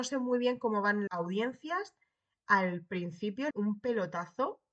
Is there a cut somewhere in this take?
yes; 2 cuts; at 1.1 s, 3.5 s

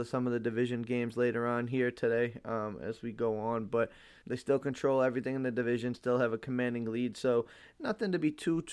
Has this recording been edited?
yes; 1 cut; at 4.2 s

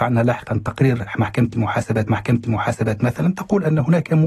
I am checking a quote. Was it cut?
yes; 1 cut; at 2.1 s

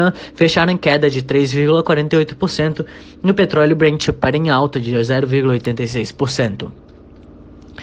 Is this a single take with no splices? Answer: yes; 0 cuts

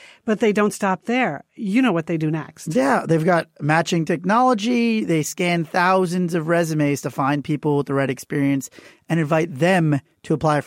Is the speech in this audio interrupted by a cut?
no; 0 cuts

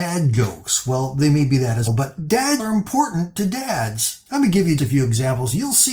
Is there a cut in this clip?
yes; 4 cuts; at 1.9 s, 2.6 s, 4.3 s, 4.8 s

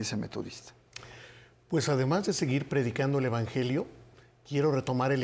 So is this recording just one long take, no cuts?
yes; 0 cuts

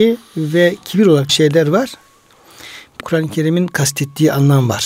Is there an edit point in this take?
yes; 2 cuts; at 1.3 s, 3.0 s

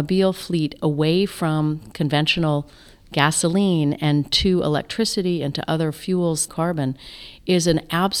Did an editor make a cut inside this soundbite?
yes; 1 cut; at 6.5 s

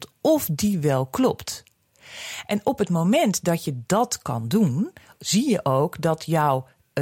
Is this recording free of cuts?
yes; 0 cuts

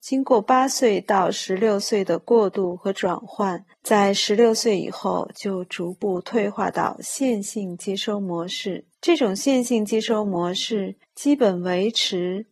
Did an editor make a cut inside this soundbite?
yes; 3 cuts; at 3.7 s, 8.9 s, 11.0 s

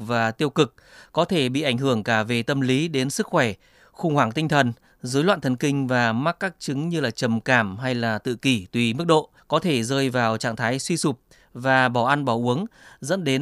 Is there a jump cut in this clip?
yes; 1 cut; at 9.4 s

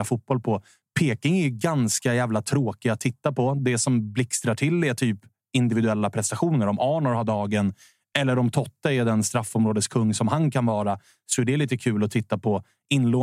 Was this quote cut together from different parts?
no; 0 cuts

